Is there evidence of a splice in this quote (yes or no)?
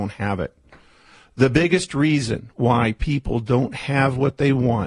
no